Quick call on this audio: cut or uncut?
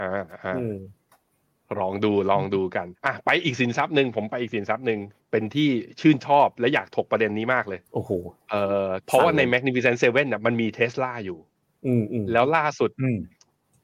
cut